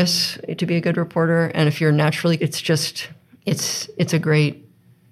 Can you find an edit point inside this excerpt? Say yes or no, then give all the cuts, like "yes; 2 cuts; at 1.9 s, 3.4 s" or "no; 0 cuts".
yes; 2 cuts; at 2.4 s, 3.2 s